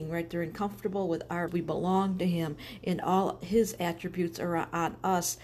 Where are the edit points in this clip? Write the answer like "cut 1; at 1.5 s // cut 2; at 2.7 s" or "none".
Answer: cut 1; at 1.5 s